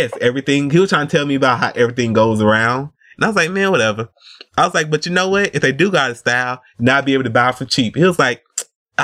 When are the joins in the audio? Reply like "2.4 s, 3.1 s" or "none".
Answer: none